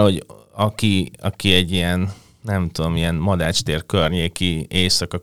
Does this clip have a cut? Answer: no; 0 cuts

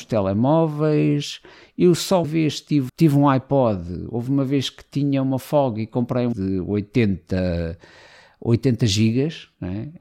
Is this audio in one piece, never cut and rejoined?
no; 3 cuts; at 2.2 s, 2.9 s, 6.3 s

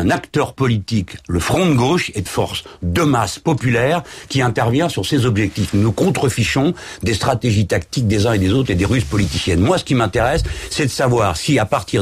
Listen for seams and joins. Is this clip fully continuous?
no; 1 cut; at 2.3 s

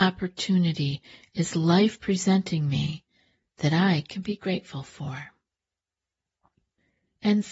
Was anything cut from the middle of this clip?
no; 0 cuts

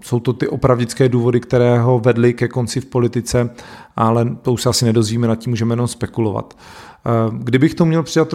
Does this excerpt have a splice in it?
no; 0 cuts

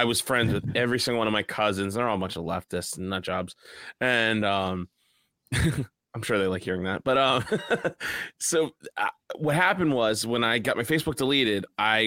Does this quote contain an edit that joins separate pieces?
no; 0 cuts

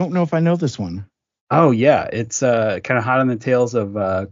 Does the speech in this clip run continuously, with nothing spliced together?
yes; 0 cuts

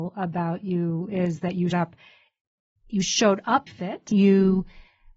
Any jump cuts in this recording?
yes; 3 cuts; at 1.7 s, 3.7 s, 4.1 s

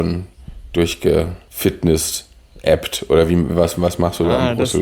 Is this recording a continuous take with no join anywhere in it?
yes; 0 cuts

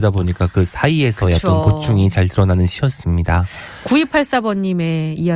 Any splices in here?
no; 0 cuts

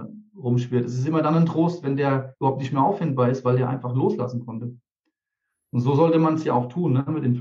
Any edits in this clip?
no; 0 cuts

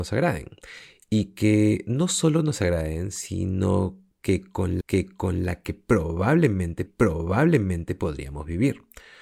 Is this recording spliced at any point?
yes; 2 cuts; at 4.8 s, 6.9 s

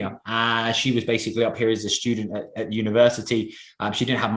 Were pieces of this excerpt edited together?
no; 0 cuts

